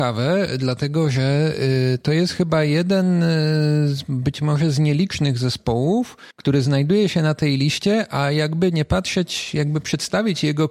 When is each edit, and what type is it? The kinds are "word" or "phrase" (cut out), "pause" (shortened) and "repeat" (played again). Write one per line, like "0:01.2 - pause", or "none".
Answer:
0:06.3 - pause